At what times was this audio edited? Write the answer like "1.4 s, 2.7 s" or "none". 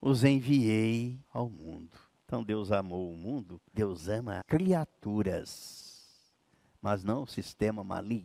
1.2 s, 2.2 s, 3.7 s, 4.4 s

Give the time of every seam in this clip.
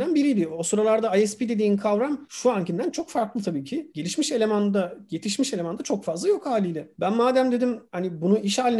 2.9 s

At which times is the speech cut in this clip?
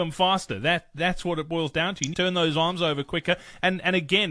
2.1 s

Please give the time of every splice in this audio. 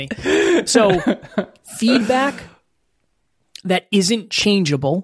none

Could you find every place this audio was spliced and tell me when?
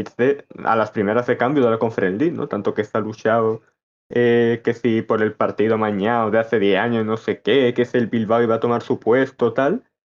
none

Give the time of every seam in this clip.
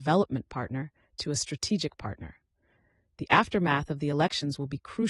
none

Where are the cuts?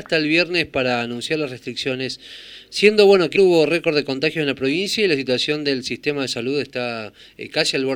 3.4 s

